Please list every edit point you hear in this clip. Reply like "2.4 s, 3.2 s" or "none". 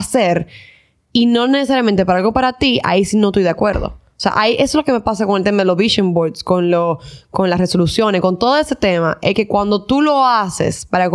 none